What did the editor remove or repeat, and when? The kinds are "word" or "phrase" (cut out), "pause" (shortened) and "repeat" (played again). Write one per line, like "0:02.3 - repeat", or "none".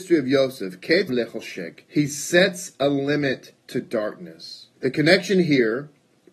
0:01.1 - word
0:01.8 - pause
0:03.6 - pause
0:04.8 - pause